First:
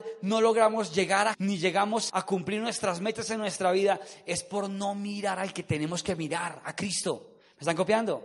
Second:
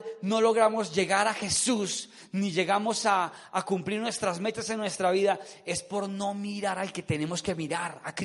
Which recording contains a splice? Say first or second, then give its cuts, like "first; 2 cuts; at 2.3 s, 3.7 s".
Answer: first; 2 cuts; at 1.3 s, 2.1 s